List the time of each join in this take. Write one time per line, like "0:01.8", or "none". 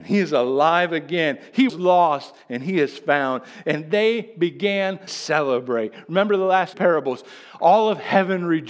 0:01.7
0:05.1
0:06.7